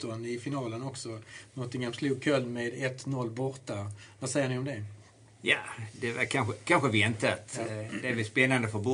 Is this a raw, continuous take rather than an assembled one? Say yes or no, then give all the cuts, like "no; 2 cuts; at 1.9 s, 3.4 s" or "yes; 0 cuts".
yes; 0 cuts